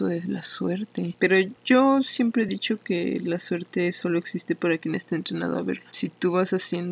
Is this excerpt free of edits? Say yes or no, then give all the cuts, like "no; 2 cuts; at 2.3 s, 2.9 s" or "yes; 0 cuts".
yes; 0 cuts